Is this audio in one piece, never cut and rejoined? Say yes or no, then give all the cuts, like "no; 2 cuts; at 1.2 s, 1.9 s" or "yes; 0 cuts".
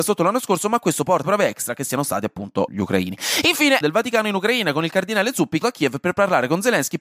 no; 3 cuts; at 1.2 s, 3.8 s, 5.6 s